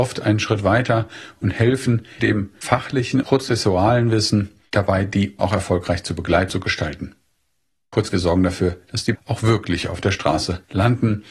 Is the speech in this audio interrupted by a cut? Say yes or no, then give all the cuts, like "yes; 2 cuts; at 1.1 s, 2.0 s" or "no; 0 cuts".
yes; 6 cuts; at 2.2 s, 3.2 s, 5.4 s, 6.5 s, 8.1 s, 9.2 s